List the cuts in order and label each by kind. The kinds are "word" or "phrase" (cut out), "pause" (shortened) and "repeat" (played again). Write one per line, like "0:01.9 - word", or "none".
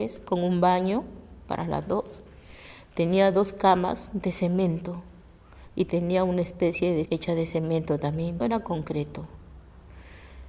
0:07.1 - word
0:08.4 - word